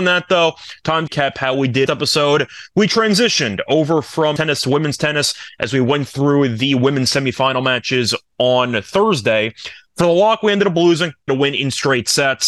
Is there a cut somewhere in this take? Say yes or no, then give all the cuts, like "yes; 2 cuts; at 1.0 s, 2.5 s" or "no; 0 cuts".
yes; 4 cuts; at 1.1 s, 1.9 s, 4.4 s, 11.3 s